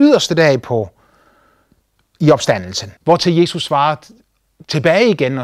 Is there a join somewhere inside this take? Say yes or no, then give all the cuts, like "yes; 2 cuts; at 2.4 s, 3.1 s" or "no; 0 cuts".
yes; 1 cut; at 3.0 s